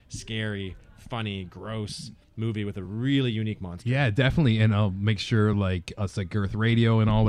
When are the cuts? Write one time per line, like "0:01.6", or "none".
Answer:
none

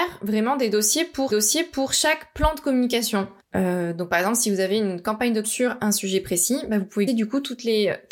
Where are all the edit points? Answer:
0:01.3
0:03.4
0:05.4
0:07.1

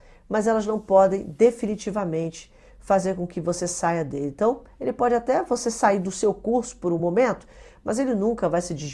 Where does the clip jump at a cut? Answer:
none

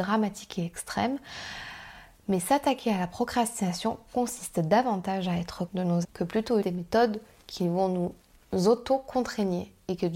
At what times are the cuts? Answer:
0:05.7
0:06.0
0:06.6

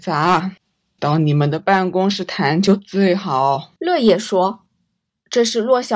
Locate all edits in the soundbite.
0:03.8
0:04.7

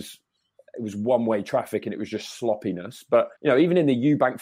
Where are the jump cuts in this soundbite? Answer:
0:03.4

